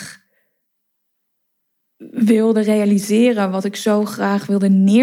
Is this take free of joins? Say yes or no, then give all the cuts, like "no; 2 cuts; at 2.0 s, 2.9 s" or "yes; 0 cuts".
yes; 0 cuts